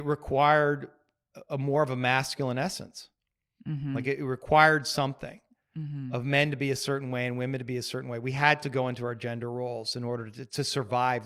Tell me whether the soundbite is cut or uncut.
uncut